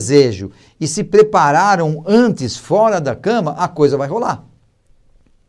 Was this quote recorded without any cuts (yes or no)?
yes